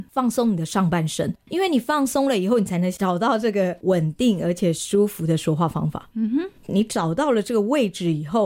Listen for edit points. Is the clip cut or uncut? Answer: cut